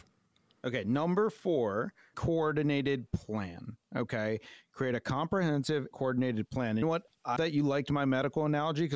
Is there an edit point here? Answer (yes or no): yes